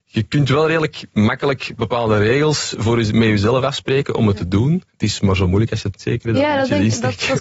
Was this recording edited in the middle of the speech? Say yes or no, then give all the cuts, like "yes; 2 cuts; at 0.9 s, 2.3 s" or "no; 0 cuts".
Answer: yes; 2 cuts; at 4.9 s, 6.0 s